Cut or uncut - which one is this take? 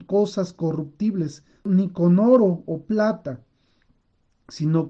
uncut